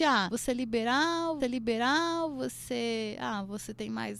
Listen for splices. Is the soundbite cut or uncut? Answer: cut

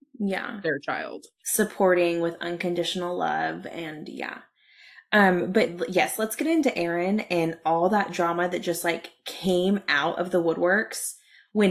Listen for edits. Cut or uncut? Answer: uncut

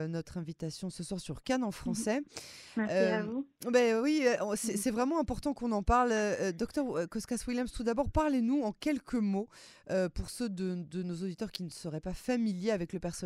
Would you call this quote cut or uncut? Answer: uncut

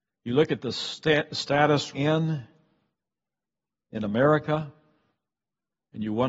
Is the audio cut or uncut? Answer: cut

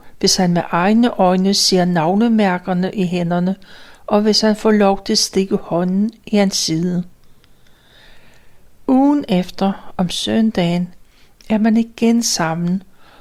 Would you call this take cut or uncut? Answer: uncut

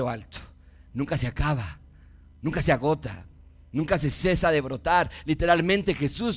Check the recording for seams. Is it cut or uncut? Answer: uncut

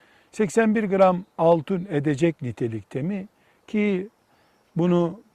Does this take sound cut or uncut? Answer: uncut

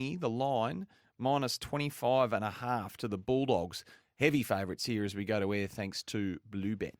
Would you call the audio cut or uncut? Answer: uncut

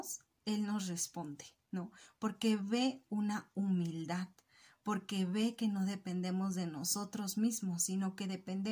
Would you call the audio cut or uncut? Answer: uncut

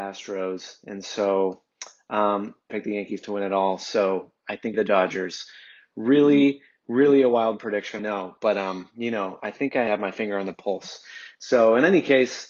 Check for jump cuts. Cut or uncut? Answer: cut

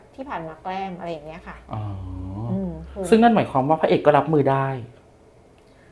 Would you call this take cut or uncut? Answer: cut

